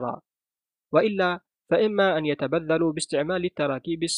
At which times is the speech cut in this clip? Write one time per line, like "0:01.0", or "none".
none